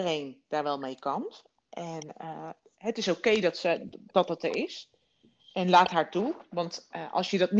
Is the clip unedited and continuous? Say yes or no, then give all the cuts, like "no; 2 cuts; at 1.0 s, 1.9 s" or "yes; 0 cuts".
yes; 0 cuts